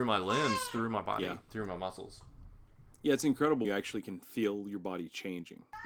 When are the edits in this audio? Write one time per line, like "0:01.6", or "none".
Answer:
0:01.5
0:03.6